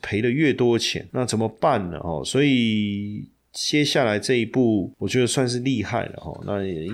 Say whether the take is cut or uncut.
uncut